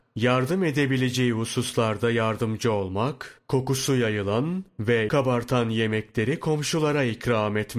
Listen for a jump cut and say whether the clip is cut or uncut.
cut